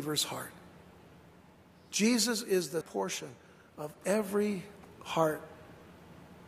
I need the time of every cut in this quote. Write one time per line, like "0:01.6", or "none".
0:02.8